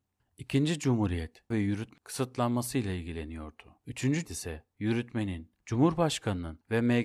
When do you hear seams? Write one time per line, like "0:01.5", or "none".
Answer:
0:01.5
0:02.0
0:04.2